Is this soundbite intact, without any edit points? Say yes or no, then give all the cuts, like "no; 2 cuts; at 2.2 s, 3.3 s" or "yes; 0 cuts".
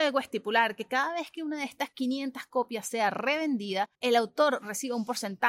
no; 1 cut; at 3.9 s